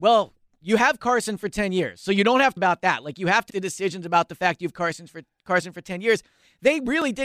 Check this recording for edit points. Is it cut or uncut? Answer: cut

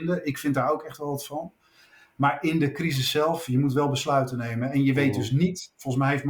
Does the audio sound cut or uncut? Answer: uncut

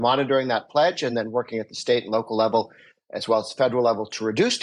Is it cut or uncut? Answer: uncut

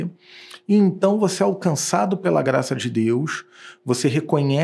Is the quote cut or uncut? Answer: uncut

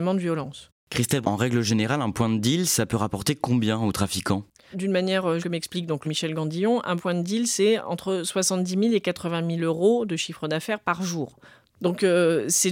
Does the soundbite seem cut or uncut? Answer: cut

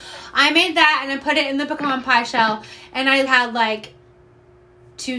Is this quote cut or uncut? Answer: cut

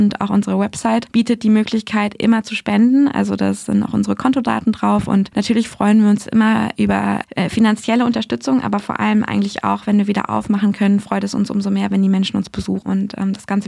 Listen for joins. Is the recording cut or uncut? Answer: uncut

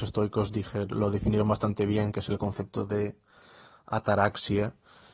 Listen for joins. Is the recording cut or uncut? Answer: uncut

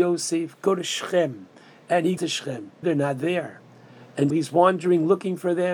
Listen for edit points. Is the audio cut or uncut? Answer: cut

